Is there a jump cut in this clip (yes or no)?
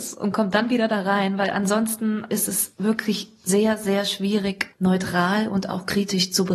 no